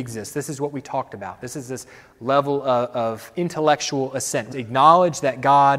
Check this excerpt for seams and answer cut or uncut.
cut